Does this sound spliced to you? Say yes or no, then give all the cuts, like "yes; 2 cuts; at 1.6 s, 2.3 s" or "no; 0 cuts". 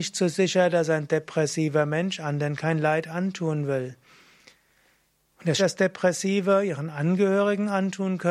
yes; 1 cut; at 5.6 s